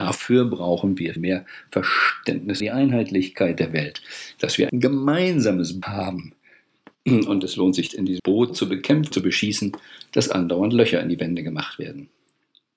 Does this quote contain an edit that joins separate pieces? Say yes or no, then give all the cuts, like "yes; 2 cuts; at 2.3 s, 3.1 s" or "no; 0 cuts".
yes; 8 cuts; at 1.2 s, 2.6 s, 4.7 s, 5.8 s, 7.9 s, 8.2 s, 8.5 s, 9.1 s